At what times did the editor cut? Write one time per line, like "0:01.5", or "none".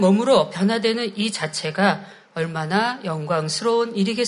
none